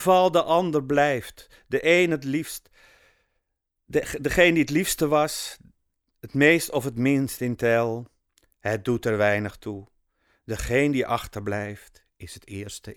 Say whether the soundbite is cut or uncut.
uncut